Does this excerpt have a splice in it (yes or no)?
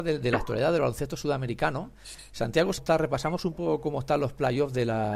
yes